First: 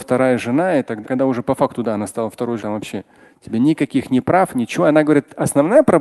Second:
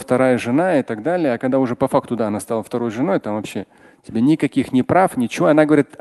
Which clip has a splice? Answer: first; 2 cuts; at 1.0 s, 2.6 s

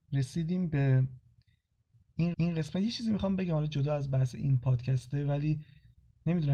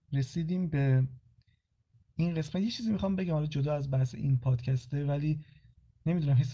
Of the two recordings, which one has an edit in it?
first; 1 cut; at 2.3 s

